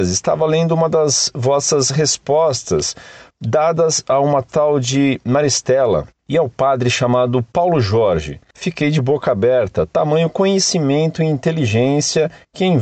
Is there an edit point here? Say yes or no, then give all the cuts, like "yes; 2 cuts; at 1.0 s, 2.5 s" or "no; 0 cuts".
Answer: no; 0 cuts